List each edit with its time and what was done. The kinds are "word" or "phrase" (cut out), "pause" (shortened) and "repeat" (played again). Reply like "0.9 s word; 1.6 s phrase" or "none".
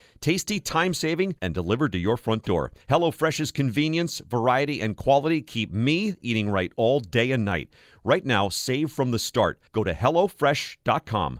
1.4 s pause; 2.8 s pause; 9.7 s pause